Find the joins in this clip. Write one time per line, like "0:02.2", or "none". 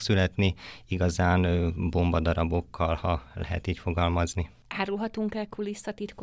none